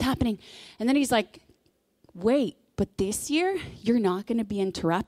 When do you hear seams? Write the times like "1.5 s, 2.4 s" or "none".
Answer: none